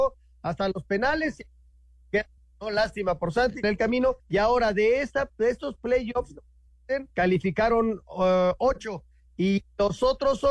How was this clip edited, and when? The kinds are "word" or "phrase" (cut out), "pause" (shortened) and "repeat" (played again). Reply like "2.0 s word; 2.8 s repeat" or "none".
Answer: 2.4 s pause; 3.6 s phrase; 4.2 s pause; 7.1 s pause